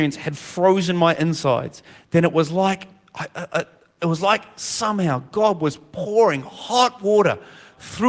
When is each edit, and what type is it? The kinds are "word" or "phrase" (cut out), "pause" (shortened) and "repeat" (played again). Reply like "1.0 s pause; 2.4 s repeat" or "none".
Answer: none